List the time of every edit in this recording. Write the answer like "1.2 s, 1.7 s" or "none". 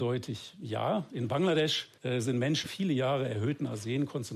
2.0 s, 2.6 s